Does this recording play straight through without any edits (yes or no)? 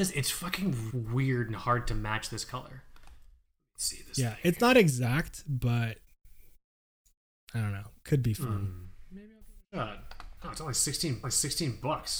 no